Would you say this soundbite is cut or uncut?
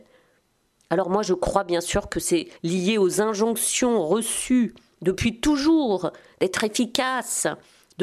cut